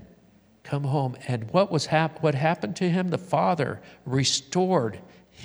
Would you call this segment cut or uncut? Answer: uncut